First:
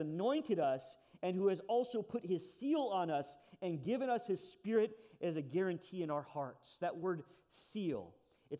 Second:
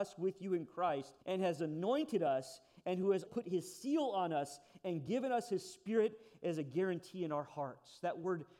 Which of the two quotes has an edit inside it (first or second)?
second